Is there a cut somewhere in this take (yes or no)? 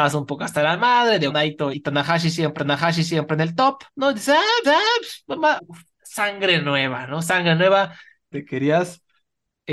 yes